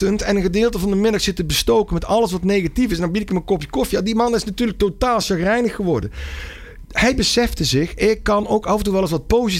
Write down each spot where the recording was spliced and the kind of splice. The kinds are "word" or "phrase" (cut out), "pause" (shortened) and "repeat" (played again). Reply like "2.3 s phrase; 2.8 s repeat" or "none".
none